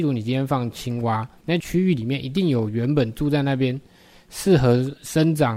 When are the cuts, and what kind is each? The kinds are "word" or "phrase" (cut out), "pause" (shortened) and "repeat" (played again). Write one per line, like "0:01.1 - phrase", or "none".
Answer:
0:01.4 - word